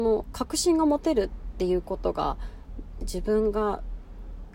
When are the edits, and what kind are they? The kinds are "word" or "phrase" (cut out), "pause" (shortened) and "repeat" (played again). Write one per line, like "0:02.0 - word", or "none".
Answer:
0:03.0 - word